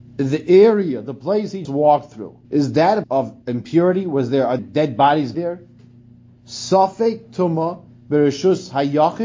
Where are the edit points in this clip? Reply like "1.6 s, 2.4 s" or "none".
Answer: 1.6 s, 2.4 s, 3.0 s, 3.4 s, 4.6 s, 5.3 s, 7.9 s